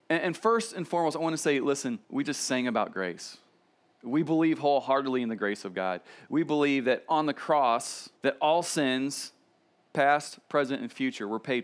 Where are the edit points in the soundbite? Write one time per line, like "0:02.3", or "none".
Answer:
0:02.0
0:08.2